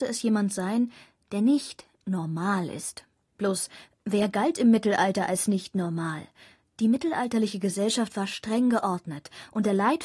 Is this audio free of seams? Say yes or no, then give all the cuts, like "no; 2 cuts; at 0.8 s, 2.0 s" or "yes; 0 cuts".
yes; 0 cuts